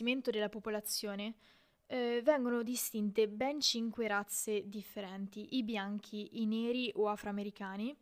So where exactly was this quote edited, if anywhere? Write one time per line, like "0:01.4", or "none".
none